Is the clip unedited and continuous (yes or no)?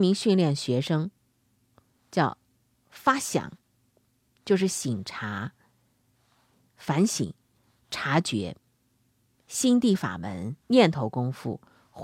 no